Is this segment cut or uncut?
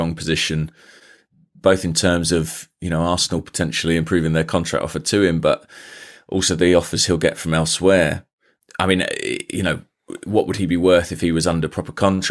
uncut